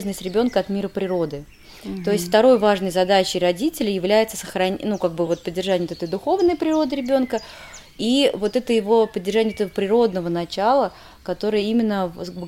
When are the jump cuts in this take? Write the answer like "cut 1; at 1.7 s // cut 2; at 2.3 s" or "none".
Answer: none